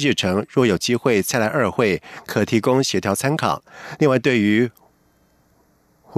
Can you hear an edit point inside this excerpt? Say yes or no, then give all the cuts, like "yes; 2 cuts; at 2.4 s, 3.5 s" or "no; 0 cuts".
no; 0 cuts